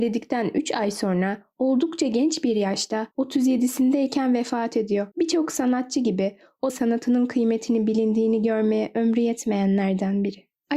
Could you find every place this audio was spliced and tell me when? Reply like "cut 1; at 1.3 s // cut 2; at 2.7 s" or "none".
cut 1; at 3.1 s // cut 2; at 5.1 s // cut 3; at 6.7 s